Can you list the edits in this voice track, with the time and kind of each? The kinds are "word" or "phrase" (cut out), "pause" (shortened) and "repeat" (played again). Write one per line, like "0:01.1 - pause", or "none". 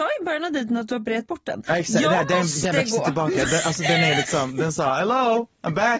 none